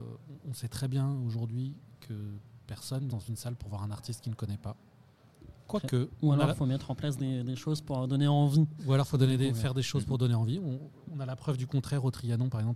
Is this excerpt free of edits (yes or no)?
no